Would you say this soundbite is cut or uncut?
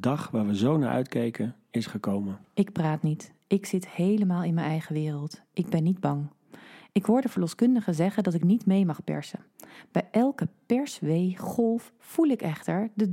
uncut